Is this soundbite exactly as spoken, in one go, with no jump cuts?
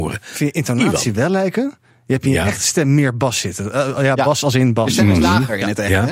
yes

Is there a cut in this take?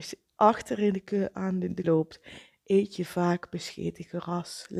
yes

